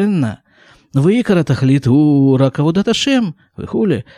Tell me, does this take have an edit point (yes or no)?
no